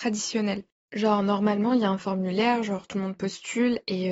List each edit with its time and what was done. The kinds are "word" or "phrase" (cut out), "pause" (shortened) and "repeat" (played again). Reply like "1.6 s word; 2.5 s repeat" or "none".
none